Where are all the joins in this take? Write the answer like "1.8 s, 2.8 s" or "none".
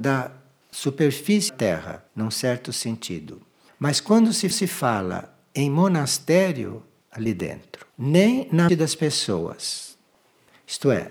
1.5 s, 2.1 s, 3.7 s, 4.5 s, 7.0 s, 7.9 s, 8.7 s